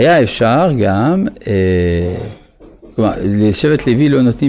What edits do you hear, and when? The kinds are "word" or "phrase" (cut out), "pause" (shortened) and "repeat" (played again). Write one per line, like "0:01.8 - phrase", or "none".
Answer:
none